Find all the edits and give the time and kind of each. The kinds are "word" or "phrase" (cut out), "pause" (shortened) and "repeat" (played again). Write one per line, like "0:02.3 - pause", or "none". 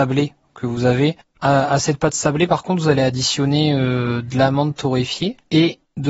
none